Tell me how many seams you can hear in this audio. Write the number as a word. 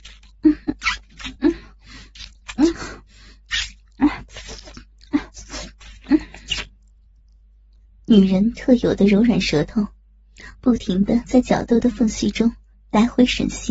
zero